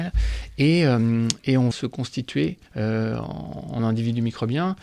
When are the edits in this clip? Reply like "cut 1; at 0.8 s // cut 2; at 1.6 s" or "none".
cut 1; at 1.4 s // cut 2; at 1.7 s // cut 3; at 2.7 s // cut 4; at 3.8 s